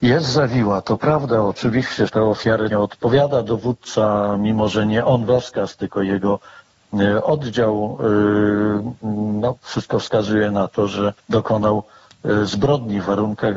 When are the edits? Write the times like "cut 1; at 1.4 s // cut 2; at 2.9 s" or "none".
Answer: cut 1; at 2.1 s // cut 2; at 2.7 s // cut 3; at 5.3 s // cut 4; at 11.2 s